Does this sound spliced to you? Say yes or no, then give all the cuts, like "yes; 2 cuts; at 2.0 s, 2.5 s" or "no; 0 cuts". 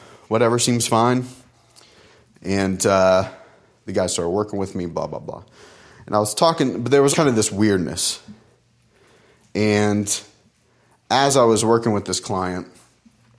yes; 1 cut; at 7.1 s